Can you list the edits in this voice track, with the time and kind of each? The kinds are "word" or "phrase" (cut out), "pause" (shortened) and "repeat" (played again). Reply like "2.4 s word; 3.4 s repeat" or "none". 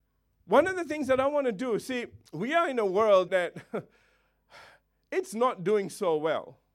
2.3 s pause; 3.3 s word

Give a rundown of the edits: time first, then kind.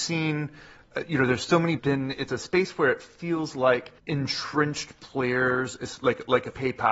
1.8 s phrase; 2.3 s phrase; 4.0 s pause

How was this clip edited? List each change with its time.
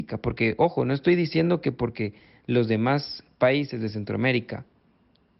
none

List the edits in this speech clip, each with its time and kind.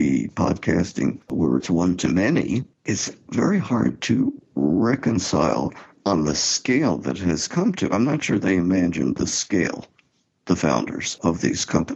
2.7 s pause

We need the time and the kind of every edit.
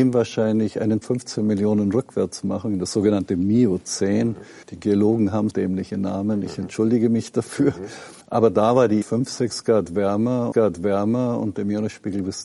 1.0 s word; 4.6 s pause; 5.5 s word; 8.2 s pause; 9.0 s word; 10.5 s repeat

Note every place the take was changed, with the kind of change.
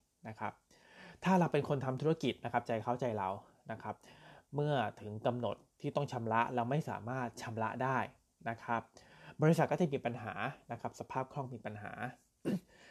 none

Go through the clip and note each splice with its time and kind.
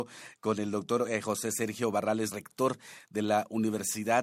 2.3 s word

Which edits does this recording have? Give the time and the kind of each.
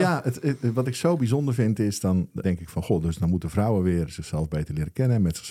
2.4 s word

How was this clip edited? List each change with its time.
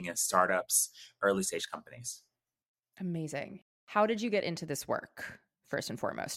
none

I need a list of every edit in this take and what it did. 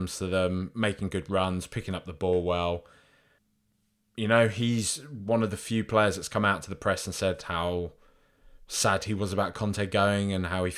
3.4 s pause

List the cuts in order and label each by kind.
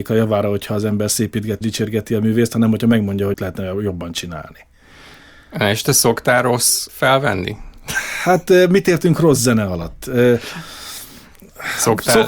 1.6 s word; 3.3 s word; 6.9 s word

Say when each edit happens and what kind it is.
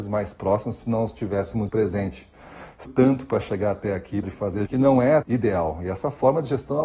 1.7 s word; 2.8 s phrase; 4.2 s phrase; 4.7 s word; 5.2 s word

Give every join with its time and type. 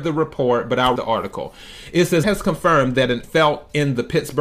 1.0 s word; 2.2 s word; 3.2 s phrase

